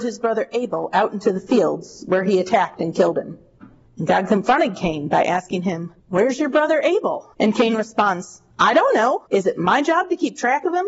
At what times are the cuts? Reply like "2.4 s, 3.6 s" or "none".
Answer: 6.0 s, 7.3 s, 8.5 s, 9.3 s